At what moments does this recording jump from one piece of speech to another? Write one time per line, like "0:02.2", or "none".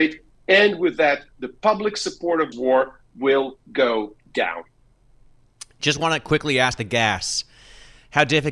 0:01.3
0:02.5
0:06.8